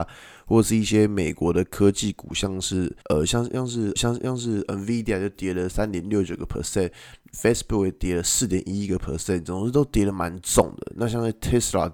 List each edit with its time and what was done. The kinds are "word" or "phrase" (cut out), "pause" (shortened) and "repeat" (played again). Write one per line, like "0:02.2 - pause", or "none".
0:03.0 - pause
0:04.0 - repeat

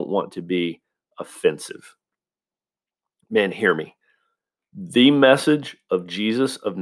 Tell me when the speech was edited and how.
none

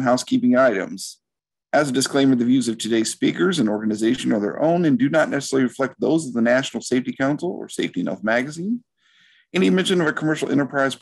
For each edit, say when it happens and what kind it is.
none

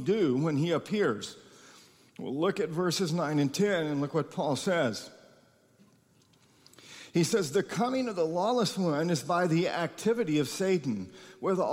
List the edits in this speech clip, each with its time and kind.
none

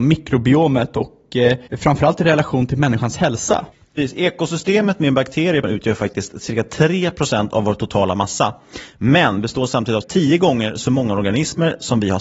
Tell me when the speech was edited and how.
0:01.7 - pause
0:03.7 - pause
0:05.6 - word
0:10.0 - word

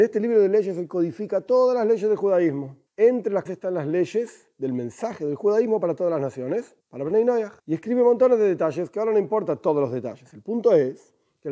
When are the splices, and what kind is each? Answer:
0:02.9 - pause
0:03.5 - word
0:06.8 - pause
0:07.6 - pause

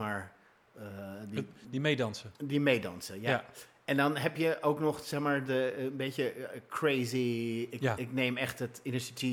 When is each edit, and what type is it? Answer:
none

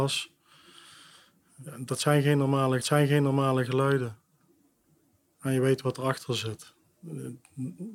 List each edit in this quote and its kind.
0:02.8 - repeat

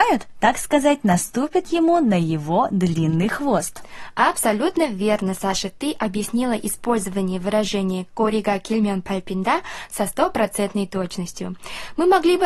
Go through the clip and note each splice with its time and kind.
none

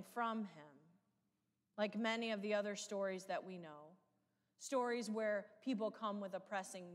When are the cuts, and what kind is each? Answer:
none

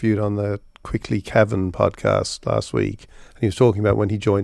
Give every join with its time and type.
none

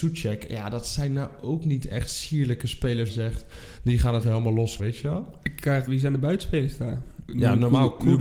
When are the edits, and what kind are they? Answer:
0:03.1 - phrase
0:04.2 - word
0:04.8 - word
0:05.9 - word

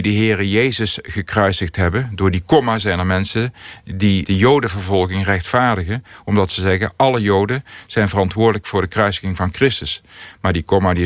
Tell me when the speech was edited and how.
0:04.2 - word

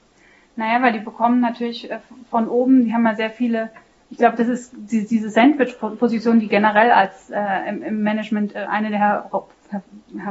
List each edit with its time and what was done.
none

